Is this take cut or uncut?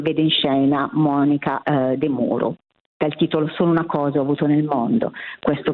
uncut